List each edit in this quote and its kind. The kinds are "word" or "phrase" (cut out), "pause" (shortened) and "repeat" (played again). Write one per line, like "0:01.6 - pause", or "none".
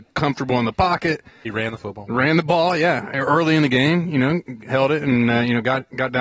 none